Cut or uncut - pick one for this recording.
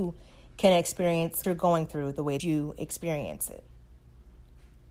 cut